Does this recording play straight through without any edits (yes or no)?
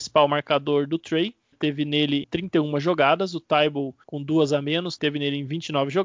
no